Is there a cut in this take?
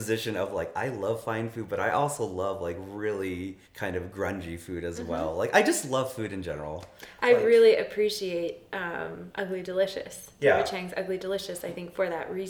yes; 1 cut; at 3.6 s

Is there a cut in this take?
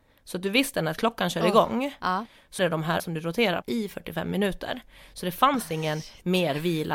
yes; 3 cuts; at 2.6 s, 3.0 s, 3.6 s

